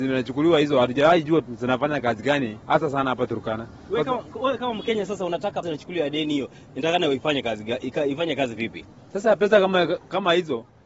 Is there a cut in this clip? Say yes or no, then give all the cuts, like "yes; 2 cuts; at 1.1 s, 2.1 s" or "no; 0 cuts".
yes; 2 cuts; at 5.6 s, 9.0 s